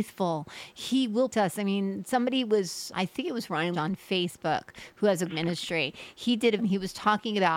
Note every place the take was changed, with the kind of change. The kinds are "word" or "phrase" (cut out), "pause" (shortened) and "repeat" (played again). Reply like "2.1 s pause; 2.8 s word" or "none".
1.3 s word; 2.9 s word; 3.7 s word; 5.3 s word; 6.6 s word